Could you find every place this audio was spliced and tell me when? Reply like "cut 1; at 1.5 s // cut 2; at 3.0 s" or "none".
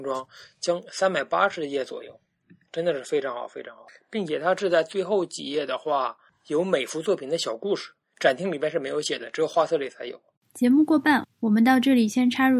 none